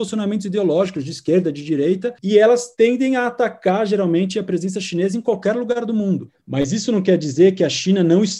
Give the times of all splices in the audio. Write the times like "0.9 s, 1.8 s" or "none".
none